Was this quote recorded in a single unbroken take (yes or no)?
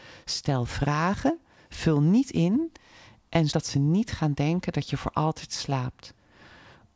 no